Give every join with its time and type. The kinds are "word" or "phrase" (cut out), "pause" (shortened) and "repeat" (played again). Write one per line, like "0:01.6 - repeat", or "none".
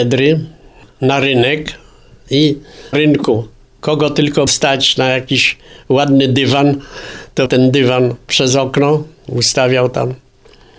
0:02.9 - word
0:04.5 - word
0:07.5 - word